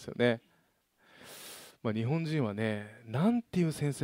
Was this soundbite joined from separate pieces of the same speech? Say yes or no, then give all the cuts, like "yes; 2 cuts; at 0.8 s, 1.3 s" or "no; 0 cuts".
yes; 1 cut; at 1.7 s